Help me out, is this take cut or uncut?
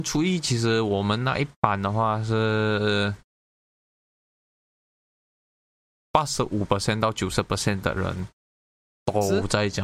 uncut